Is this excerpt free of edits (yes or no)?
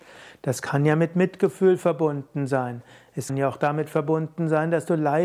no